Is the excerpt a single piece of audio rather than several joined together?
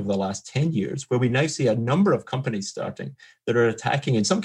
yes; 0 cuts

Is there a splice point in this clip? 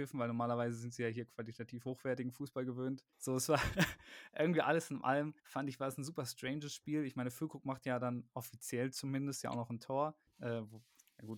yes; 3 cuts; at 3.1 s, 5.4 s, 10.3 s

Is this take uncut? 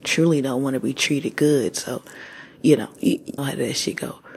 no; 1 cut; at 3.4 s

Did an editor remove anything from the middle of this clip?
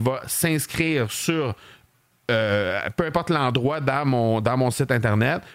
no; 0 cuts

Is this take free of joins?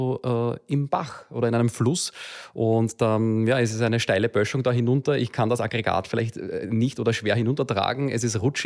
yes; 0 cuts

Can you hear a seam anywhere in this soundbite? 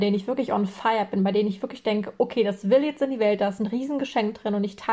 no; 0 cuts

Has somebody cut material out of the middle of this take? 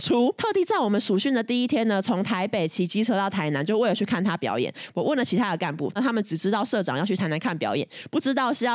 yes; 1 cut; at 6.0 s

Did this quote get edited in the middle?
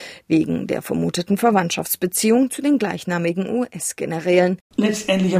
no; 0 cuts

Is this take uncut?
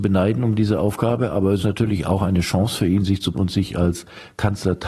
no; 2 cuts; at 1.6 s, 3.3 s

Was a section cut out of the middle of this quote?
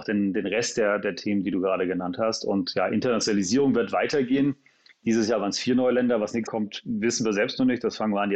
yes; 1 cut; at 6.5 s

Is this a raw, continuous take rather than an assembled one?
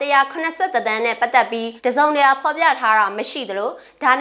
no; 1 cut; at 1.8 s

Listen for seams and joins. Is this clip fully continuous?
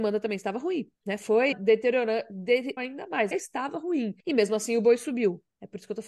no; 5 cuts; at 1.0 s, 1.5 s, 2.8 s, 3.3 s, 4.2 s

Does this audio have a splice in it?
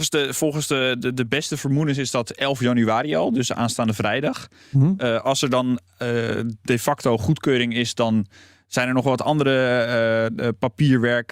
no; 0 cuts

